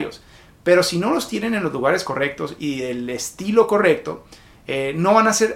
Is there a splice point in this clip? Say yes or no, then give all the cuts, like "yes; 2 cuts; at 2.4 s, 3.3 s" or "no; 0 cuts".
no; 0 cuts